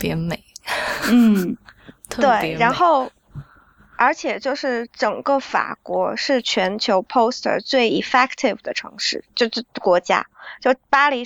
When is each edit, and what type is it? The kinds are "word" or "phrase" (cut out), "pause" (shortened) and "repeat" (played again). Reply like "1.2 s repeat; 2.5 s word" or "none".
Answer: none